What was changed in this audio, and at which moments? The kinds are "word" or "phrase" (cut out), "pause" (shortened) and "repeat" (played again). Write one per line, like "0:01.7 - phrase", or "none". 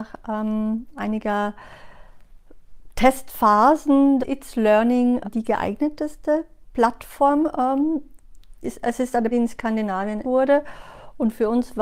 0:04.2 - word
0:05.2 - word
0:08.6 - word
0:09.3 - word
0:10.2 - word